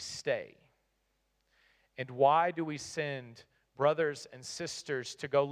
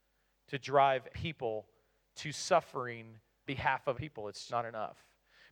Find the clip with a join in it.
second; 4 cuts; at 1.1 s, 3.5 s, 3.9 s, 4.5 s

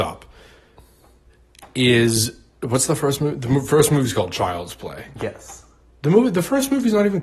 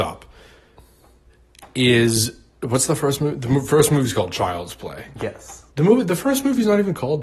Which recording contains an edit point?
second; 1 cut; at 5.7 s

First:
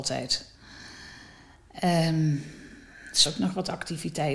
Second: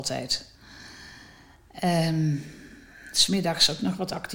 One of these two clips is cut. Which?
first; 1 cut; at 3.3 s

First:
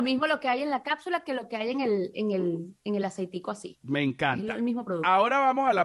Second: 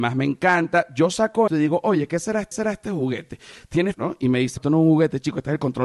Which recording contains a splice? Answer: second; 4 cuts; at 1.5 s, 2.5 s, 3.9 s, 4.6 s

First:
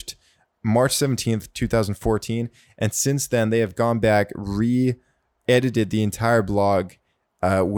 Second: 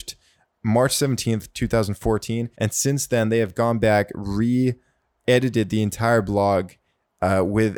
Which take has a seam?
second; 1 cut; at 2.5 s

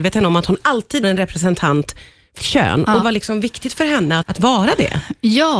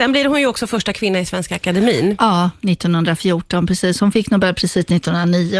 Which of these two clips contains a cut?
first; 4 cuts; at 1.0 s, 2.4 s, 3.0 s, 4.2 s

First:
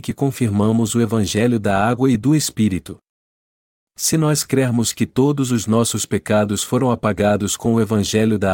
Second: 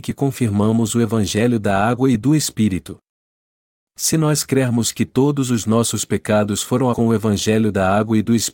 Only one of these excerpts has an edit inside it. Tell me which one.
second; 1 cut; at 6.9 s

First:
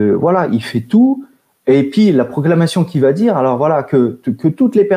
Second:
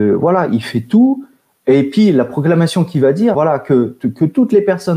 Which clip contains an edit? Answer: second; 1 cut; at 3.3 s

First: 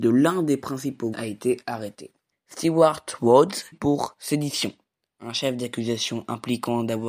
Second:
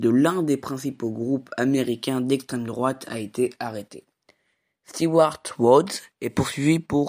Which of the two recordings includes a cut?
first; 3 cuts; at 1.1 s, 2.3 s, 3.7 s

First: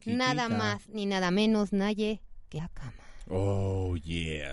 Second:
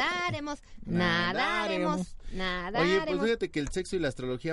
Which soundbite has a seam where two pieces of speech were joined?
first; 1 cut; at 2.6 s

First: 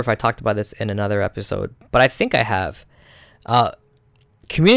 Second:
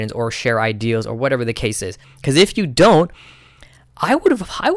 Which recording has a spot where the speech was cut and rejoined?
second; 1 cut; at 2.0 s

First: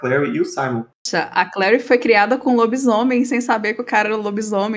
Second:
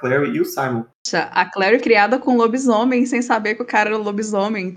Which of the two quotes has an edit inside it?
second; 1 cut; at 1.8 s

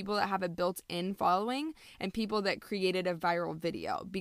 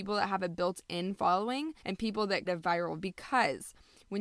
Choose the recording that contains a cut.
second; 3 cuts; at 1.8 s, 2.4 s, 3.0 s

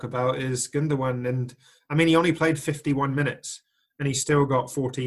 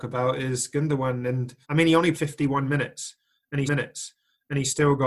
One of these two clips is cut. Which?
second; 3 cuts; at 1.6 s, 2.1 s, 3.7 s

